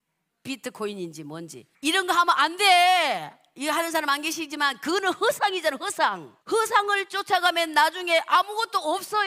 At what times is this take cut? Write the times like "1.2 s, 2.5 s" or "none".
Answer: 1.7 s, 6.4 s